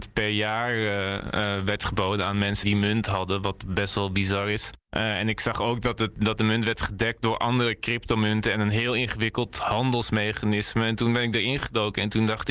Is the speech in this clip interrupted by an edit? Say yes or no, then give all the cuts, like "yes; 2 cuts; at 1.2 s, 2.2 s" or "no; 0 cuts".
yes; 2 cuts; at 2.6 s, 4.8 s